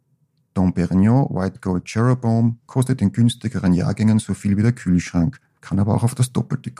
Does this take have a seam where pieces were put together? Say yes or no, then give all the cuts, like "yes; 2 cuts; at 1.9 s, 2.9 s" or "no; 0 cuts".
yes; 2 cuts; at 2.6 s, 5.6 s